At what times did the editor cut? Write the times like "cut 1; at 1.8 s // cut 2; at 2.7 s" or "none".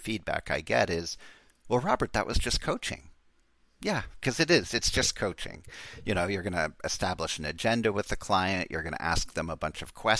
none